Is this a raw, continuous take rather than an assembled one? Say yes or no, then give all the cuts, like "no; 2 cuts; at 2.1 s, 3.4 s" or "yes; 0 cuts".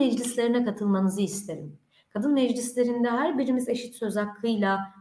yes; 0 cuts